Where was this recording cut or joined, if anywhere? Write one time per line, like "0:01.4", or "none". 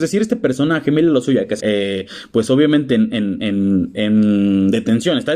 0:01.6